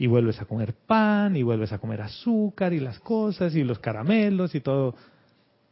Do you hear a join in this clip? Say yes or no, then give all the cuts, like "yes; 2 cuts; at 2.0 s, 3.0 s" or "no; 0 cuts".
no; 0 cuts